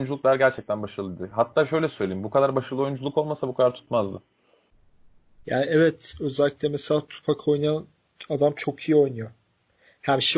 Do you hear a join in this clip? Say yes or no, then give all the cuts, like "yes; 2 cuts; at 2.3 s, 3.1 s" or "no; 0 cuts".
no; 0 cuts